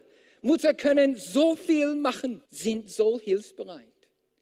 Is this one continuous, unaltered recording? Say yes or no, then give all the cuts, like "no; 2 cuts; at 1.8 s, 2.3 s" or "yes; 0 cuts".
no; 1 cut; at 2.5 s